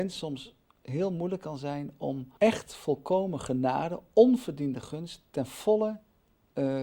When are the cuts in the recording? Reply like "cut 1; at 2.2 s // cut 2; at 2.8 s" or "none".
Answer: cut 1; at 2.4 s